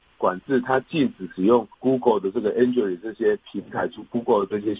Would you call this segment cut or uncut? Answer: cut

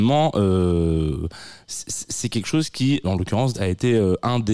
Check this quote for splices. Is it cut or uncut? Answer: cut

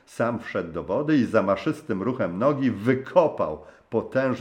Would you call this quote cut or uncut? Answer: uncut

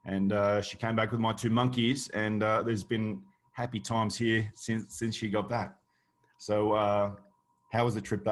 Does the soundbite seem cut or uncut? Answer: uncut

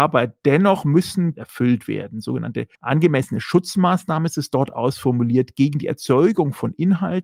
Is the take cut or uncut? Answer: cut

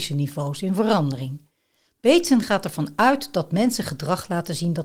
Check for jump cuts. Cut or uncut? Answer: uncut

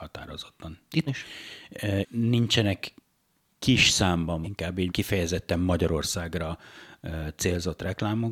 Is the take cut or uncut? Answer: cut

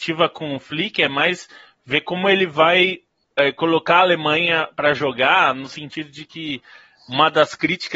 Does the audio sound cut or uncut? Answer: uncut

